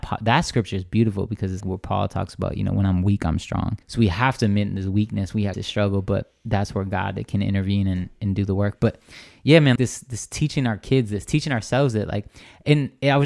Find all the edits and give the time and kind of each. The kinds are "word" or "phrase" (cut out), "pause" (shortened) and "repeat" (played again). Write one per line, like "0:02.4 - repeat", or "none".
0:01.6 - word
0:03.8 - pause
0:05.5 - phrase
0:09.8 - word